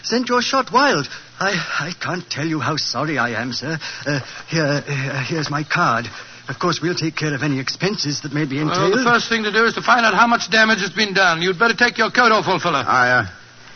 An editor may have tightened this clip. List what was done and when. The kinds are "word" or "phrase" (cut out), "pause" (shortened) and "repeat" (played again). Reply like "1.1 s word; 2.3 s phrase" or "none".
1.3 s pause